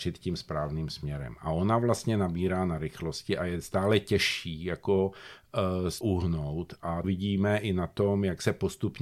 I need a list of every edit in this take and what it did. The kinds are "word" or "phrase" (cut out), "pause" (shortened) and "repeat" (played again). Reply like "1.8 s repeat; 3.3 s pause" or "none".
6.0 s word; 7.0 s word